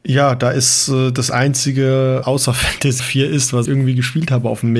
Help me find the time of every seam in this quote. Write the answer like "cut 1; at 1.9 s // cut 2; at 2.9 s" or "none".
cut 1; at 2.2 s // cut 2; at 3.0 s // cut 3; at 3.7 s